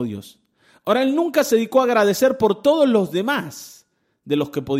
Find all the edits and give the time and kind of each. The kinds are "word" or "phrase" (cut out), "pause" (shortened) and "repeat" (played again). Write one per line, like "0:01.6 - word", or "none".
none